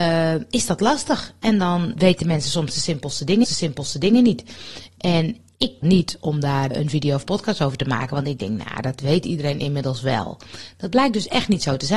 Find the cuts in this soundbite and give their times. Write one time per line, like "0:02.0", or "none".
0:02.0
0:03.4
0:05.8
0:06.7

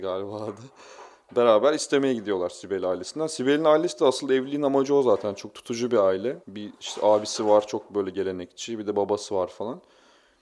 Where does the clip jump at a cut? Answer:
0:06.4

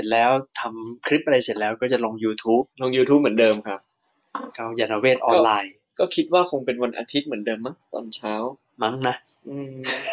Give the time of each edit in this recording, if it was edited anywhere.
0:02.7

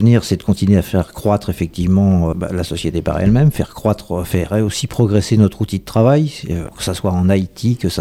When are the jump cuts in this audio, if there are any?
0:02.3
0:06.7

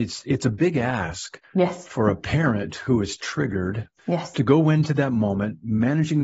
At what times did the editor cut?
0:01.4
0:04.0

